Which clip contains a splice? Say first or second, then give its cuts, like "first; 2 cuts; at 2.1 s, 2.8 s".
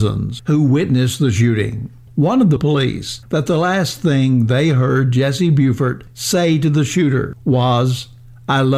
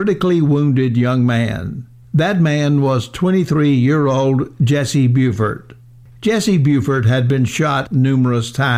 first; 1 cut; at 2.6 s